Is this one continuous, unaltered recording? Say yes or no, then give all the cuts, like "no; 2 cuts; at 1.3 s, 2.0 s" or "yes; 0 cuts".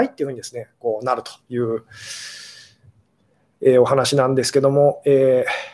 no; 1 cut; at 1.4 s